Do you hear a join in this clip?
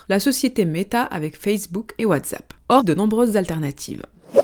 yes; 2 cuts; at 2.0 s, 2.8 s

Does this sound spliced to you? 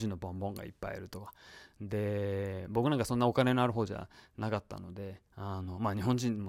no; 0 cuts

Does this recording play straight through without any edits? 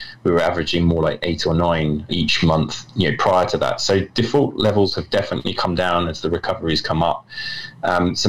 no; 2 cuts; at 2.1 s, 2.9 s

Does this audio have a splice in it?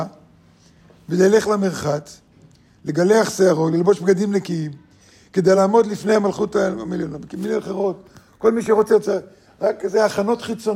no; 0 cuts

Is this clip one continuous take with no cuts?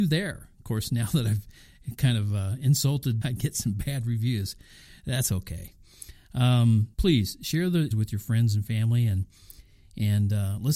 no; 3 cuts; at 3.2 s, 6.9 s, 7.9 s

